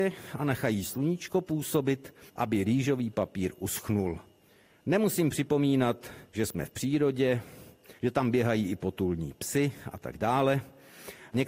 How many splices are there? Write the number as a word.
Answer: three